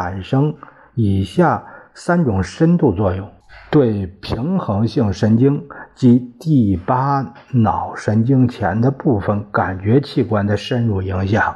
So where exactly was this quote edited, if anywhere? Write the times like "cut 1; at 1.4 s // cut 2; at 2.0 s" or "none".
none